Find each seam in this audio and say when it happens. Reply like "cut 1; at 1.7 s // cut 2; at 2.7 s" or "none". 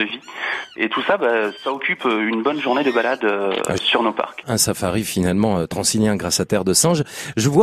cut 1; at 3.8 s // cut 2; at 4.4 s